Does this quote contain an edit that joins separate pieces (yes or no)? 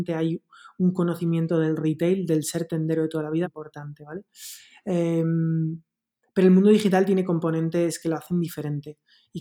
yes